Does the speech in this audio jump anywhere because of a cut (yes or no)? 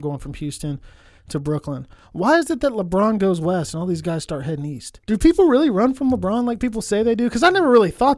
yes